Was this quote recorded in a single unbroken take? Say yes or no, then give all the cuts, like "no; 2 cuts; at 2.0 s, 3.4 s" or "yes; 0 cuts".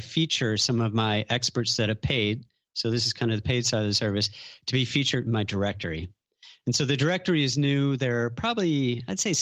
yes; 0 cuts